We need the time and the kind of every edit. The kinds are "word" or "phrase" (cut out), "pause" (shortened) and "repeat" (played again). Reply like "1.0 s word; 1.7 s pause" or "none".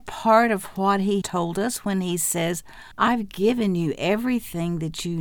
1.2 s word; 2.9 s pause